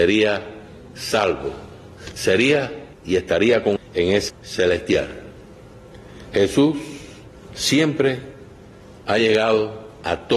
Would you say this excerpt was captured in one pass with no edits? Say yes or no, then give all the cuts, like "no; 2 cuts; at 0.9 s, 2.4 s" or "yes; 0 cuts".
no; 4 cuts; at 2.9 s, 3.8 s, 4.3 s, 7.3 s